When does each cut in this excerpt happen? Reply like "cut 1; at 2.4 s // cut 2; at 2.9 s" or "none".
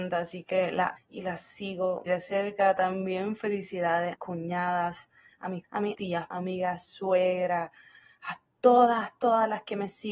cut 1; at 1.0 s // cut 2; at 2.1 s // cut 3; at 4.1 s // cut 4; at 5.6 s // cut 5; at 6.0 s // cut 6; at 6.3 s